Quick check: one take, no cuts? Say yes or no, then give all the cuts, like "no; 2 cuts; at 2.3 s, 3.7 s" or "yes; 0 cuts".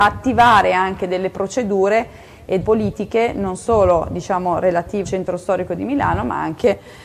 no; 2 cuts; at 2.6 s, 5.0 s